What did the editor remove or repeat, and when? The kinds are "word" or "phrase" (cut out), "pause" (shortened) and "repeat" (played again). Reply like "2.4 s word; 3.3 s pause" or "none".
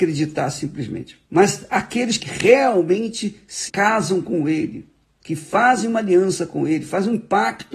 1.2 s pause; 2.2 s word; 3.7 s word; 5.0 s pause